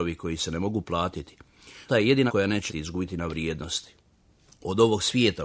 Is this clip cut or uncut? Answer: cut